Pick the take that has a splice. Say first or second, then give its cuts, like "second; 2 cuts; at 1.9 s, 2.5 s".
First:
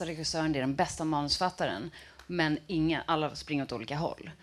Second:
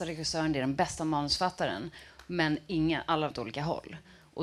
second; 1 cut; at 3.3 s